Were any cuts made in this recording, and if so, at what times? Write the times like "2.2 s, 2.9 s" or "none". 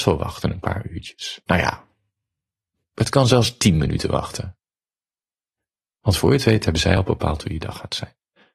none